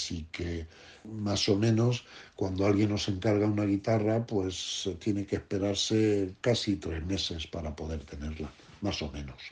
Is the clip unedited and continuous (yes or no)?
yes